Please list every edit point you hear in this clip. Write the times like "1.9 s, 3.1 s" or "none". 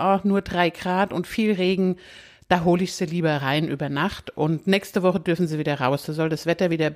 none